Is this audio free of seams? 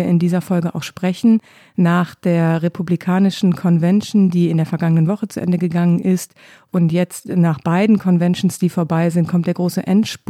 yes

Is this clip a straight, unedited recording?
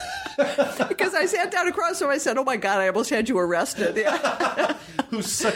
yes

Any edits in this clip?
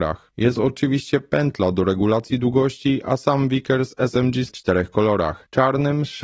yes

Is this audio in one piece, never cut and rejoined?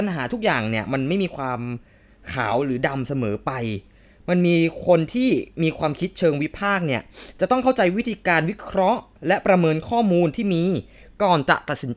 yes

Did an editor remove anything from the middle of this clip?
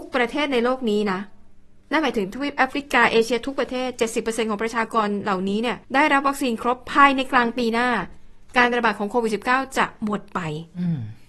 yes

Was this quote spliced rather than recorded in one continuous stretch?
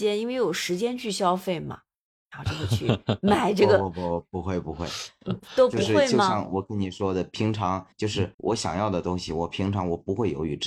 yes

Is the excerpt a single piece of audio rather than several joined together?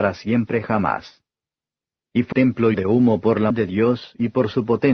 no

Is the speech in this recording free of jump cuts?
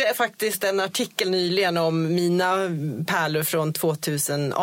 yes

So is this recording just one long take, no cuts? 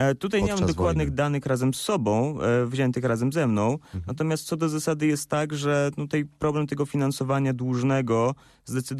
yes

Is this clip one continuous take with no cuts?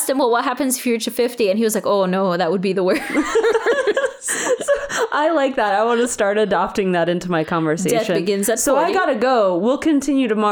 yes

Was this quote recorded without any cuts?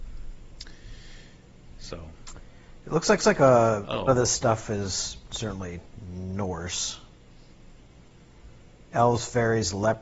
no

